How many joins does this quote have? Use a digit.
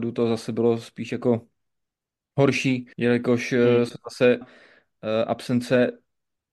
2